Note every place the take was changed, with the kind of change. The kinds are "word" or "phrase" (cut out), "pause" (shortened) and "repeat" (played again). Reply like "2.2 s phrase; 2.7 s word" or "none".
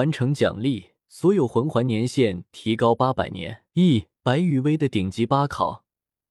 1.0 s pause; 3.7 s pause; 4.2 s pause